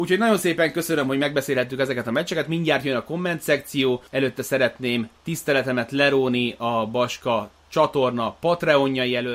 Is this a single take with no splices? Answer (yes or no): no